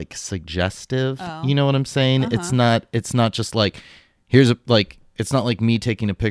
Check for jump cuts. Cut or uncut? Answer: uncut